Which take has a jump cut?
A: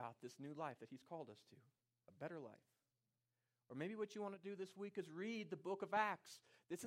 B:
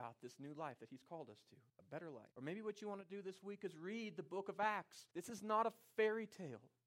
B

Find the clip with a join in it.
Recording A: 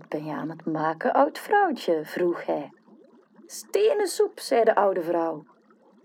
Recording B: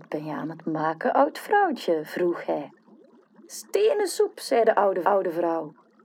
B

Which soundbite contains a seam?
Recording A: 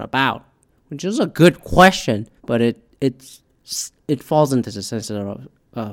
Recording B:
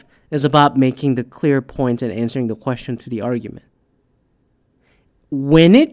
A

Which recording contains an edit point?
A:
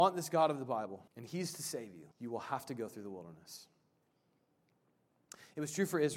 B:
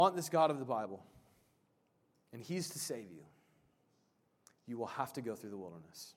A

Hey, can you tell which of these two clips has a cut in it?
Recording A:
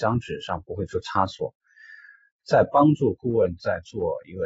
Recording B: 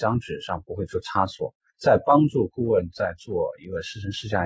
B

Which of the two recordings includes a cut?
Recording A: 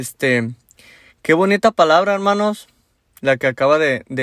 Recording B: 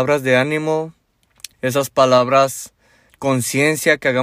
B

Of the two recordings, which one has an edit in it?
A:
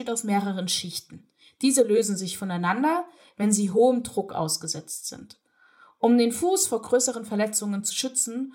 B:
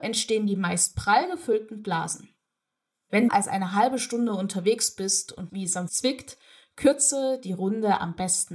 B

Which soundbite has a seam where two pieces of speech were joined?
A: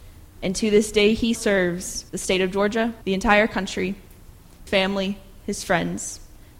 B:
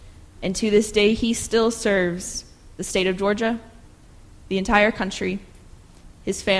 A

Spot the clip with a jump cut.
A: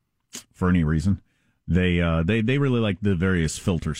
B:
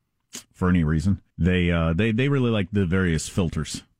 B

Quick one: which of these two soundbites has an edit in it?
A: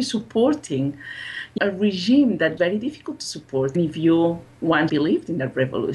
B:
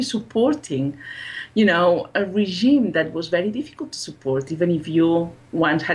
A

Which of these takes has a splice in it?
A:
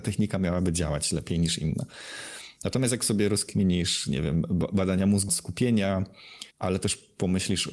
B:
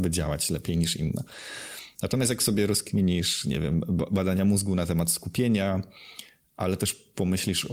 A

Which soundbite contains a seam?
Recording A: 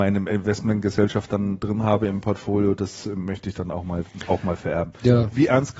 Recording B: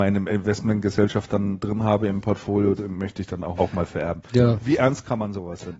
B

